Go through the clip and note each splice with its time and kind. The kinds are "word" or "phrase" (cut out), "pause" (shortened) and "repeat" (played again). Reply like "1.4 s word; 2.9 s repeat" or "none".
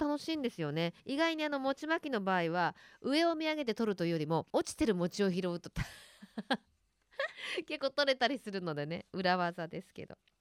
1.0 s pause; 4.5 s pause